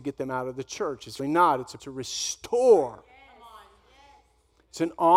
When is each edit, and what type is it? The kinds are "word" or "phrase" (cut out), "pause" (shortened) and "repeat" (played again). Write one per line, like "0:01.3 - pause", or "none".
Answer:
0:01.2 - word
0:01.8 - word